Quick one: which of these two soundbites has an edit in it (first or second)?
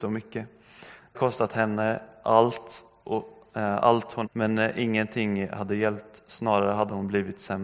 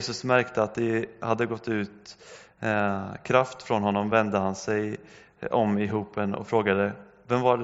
first